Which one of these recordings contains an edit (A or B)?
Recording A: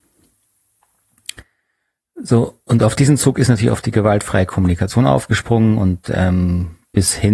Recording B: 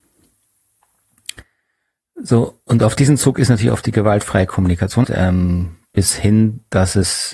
B